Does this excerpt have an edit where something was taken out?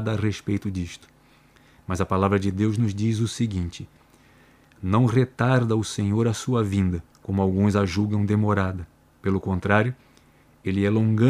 yes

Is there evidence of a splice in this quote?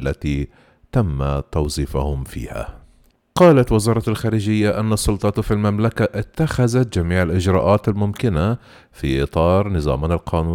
no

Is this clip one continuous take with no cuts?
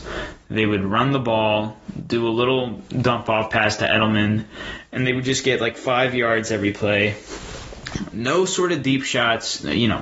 yes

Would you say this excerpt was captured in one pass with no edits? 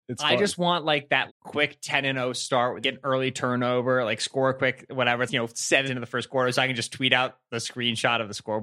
no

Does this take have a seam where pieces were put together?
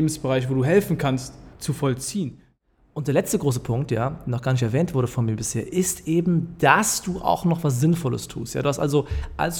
yes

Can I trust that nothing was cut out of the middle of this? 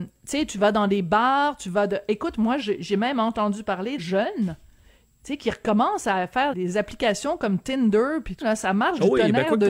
no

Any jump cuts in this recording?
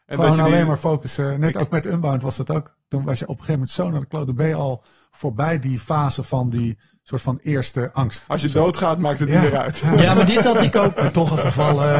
no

